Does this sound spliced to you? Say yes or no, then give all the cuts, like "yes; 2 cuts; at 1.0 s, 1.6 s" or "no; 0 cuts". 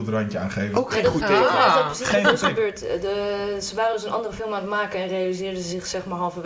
no; 0 cuts